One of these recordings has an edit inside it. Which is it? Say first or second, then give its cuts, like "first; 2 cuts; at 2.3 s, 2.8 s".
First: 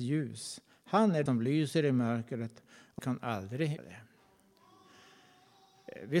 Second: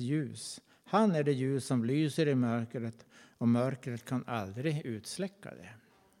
first; 3 cuts; at 1.3 s, 3.0 s, 3.8 s